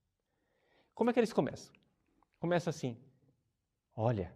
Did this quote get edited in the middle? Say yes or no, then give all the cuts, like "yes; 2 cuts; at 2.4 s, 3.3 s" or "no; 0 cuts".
no; 0 cuts